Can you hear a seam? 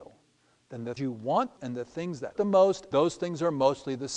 yes; 4 cuts; at 1.0 s, 1.6 s, 2.3 s, 2.9 s

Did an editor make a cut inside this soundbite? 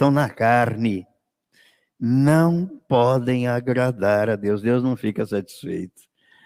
no; 0 cuts

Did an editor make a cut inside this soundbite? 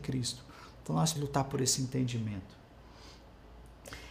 yes; 1 cut; at 1.2 s

